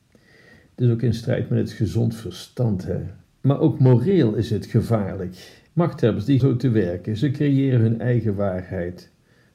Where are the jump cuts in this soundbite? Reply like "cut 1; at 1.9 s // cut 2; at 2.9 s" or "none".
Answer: cut 1; at 3.2 s // cut 2; at 5.7 s // cut 3; at 6.4 s